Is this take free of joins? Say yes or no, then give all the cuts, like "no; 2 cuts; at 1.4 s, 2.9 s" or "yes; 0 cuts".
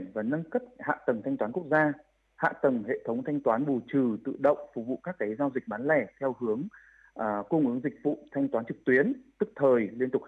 yes; 0 cuts